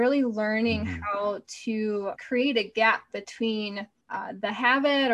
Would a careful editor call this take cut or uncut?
cut